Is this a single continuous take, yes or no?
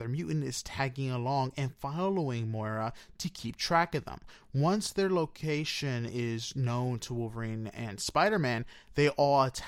yes